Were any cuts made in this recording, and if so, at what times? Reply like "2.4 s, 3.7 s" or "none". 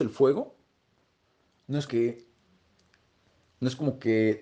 1.9 s